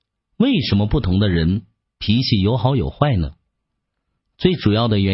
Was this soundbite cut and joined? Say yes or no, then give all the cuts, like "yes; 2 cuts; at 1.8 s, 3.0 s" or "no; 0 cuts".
no; 0 cuts